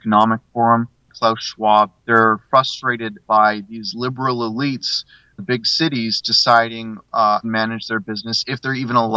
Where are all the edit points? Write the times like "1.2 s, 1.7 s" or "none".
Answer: 1.1 s, 2.0 s, 3.2 s, 5.4 s, 7.4 s

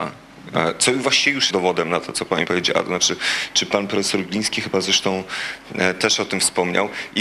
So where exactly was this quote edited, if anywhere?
1.5 s, 2.5 s

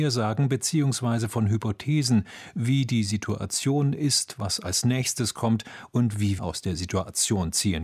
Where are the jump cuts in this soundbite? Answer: 6.4 s

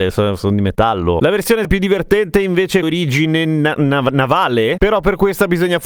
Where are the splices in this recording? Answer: 1.6 s, 2.8 s

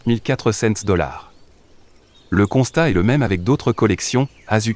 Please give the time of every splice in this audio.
none

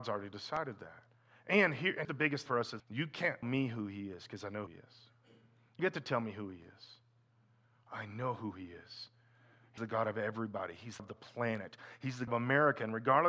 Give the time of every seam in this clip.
2.0 s, 2.5 s, 2.8 s, 3.4 s, 4.7 s, 5.8 s, 9.8 s, 11.0 s, 12.3 s

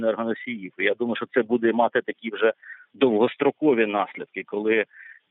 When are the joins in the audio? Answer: none

